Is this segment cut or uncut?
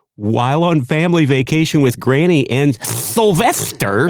uncut